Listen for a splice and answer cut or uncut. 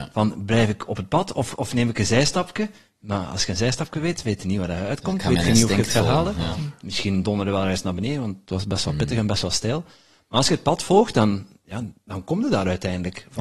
uncut